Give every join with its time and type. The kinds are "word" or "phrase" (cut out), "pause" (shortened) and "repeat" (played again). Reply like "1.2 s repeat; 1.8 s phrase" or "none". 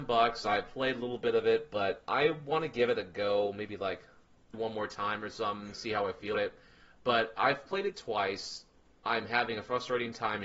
4.5 s word; 6.3 s word